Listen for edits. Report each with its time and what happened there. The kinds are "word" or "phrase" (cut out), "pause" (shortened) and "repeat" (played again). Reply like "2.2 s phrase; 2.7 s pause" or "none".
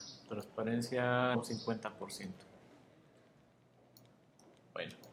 1.3 s phrase